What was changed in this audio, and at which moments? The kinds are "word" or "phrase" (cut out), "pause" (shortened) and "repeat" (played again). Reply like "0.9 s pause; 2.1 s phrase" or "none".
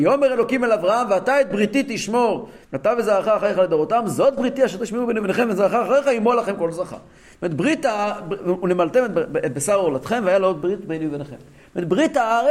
2.6 s pause